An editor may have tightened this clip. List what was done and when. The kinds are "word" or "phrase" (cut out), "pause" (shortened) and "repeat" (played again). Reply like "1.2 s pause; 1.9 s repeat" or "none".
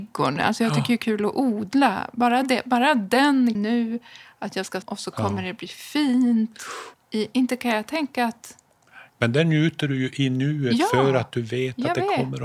3.5 s word; 4.8 s phrase; 6.9 s pause; 9.1 s pause